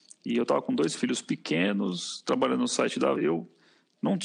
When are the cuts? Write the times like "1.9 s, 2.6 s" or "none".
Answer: 3.2 s